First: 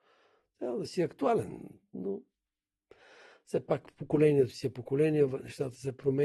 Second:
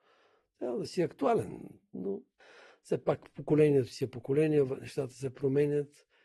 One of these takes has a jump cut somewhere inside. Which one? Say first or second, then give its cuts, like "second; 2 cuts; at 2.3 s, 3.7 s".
second; 1 cut; at 2.4 s